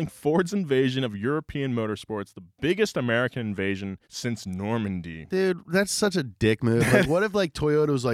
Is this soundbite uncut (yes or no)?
no